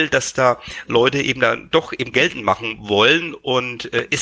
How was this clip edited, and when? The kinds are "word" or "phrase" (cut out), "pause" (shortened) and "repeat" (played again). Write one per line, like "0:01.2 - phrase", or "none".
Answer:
0:01.7 - word
0:02.1 - word